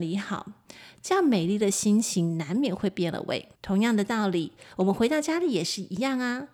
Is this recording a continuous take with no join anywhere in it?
no; 1 cut; at 3.5 s

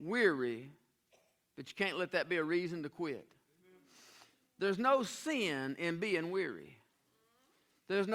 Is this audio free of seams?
yes; 0 cuts

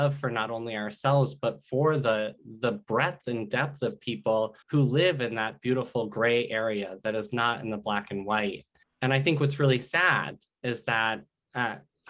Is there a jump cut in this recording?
yes; 2 cuts; at 4.6 s, 8.8 s

